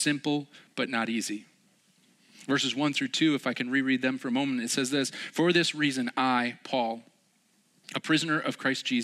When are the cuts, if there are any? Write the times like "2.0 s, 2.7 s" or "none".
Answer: none